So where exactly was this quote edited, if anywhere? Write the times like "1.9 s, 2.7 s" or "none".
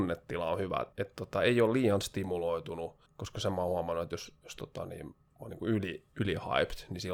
0.9 s, 3.1 s, 6.1 s